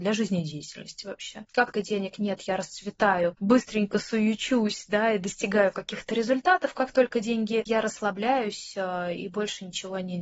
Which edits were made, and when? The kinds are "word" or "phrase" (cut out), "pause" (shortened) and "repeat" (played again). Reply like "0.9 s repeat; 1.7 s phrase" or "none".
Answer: 1.7 s word; 3.3 s word; 7.7 s word

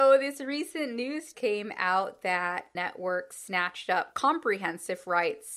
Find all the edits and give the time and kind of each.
1.3 s word; 2.7 s word; 4.1 s word

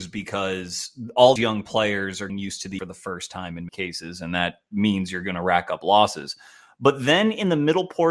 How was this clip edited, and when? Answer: 1.4 s word; 2.3 s word; 2.8 s phrase; 3.7 s word

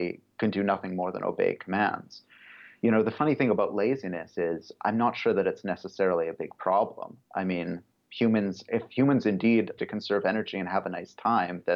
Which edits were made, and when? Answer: 7.9 s pause; 9.8 s word

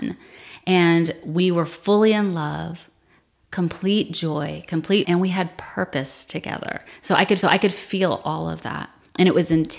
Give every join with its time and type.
5.0 s word; 7.4 s repeat

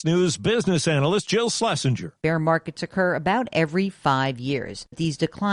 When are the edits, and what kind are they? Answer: none

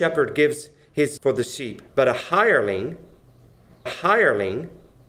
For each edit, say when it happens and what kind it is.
1.2 s word; 1.9 s pause; 3.9 s repeat

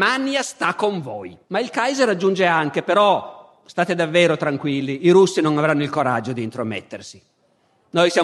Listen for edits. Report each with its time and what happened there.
1.4 s pause

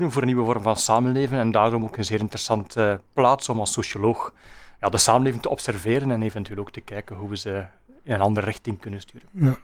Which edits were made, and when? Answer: none

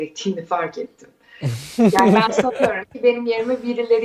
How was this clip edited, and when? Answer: none

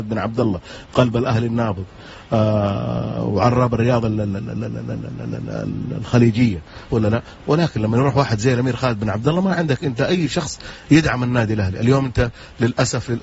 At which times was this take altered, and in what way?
6.9 s word

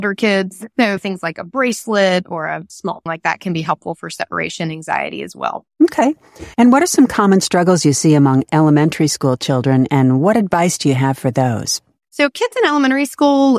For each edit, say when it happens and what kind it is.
3.1 s phrase; 6.5 s pause

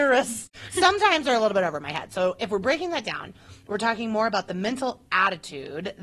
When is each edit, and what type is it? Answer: none

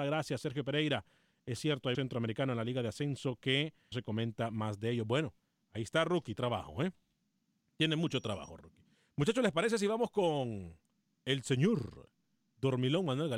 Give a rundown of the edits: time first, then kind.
1.9 s word; 3.9 s word; 6.3 s word

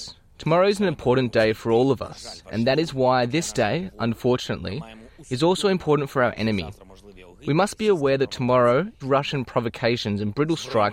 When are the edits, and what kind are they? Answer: 9.0 s word

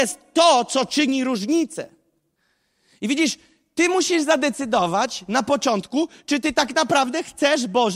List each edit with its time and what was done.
none

